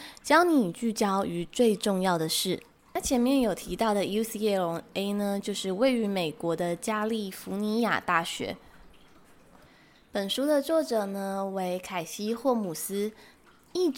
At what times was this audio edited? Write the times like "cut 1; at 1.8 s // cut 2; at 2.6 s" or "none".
none